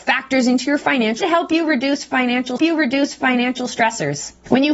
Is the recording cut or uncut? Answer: cut